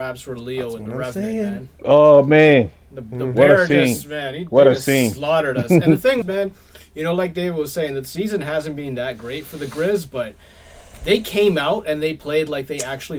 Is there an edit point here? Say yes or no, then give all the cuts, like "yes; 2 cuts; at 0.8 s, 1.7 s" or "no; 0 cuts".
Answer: yes; 1 cut; at 6.2 s